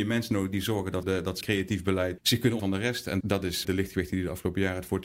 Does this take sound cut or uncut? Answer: cut